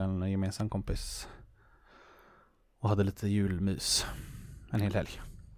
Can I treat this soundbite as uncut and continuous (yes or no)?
yes